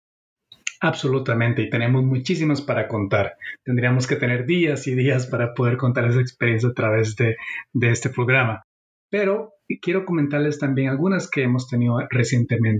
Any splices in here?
no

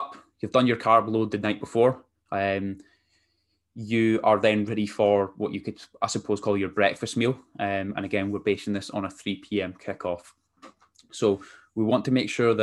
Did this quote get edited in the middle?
no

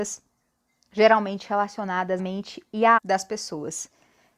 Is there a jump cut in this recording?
yes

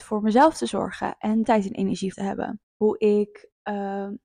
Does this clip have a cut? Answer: yes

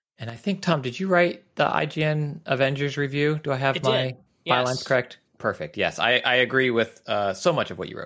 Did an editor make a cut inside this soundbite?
no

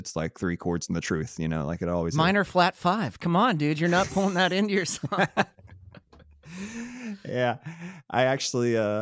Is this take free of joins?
yes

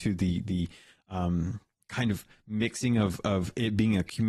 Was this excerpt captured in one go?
yes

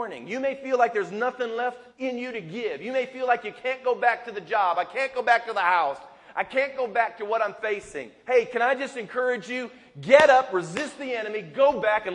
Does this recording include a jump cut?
yes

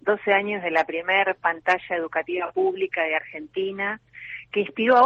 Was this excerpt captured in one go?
yes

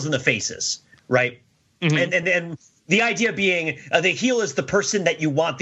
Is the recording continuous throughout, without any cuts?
yes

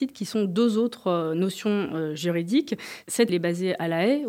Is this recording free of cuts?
no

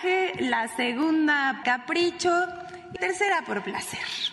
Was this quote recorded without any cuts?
no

